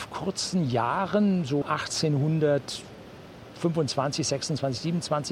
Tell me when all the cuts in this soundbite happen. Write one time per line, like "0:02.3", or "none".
0:01.6